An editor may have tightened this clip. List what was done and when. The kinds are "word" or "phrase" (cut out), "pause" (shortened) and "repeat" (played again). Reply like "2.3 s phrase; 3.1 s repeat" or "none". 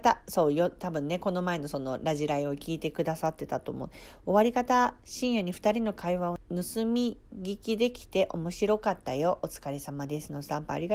7.3 s pause